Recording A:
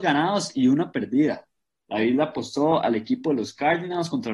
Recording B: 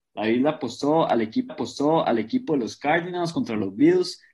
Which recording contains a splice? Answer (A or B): B